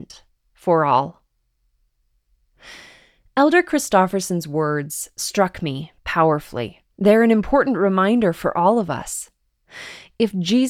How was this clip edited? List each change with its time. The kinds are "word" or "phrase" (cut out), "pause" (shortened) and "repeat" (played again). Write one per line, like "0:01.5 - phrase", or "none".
0:06.9 - pause